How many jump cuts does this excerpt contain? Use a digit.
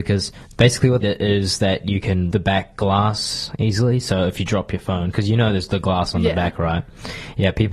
2